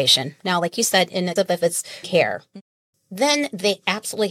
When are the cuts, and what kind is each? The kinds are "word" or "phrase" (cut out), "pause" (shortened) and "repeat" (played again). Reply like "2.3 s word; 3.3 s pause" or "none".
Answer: 1.4 s word; 2.0 s word